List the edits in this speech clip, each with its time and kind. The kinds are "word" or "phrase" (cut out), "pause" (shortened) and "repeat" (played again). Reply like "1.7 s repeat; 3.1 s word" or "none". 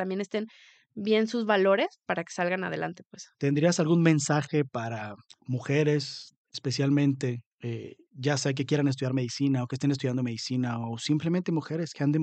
3.3 s pause; 5.3 s pause; 7.5 s pause